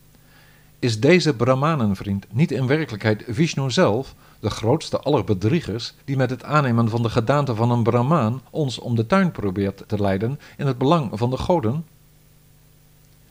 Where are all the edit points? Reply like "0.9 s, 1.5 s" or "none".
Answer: 6.0 s, 8.5 s